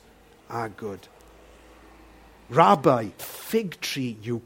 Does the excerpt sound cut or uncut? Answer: cut